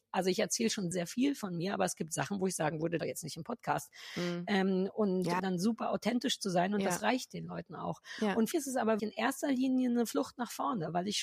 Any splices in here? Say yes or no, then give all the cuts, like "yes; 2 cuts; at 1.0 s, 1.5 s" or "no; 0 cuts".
yes; 5 cuts; at 0.9 s, 3.0 s, 5.4 s, 8.5 s, 9.0 s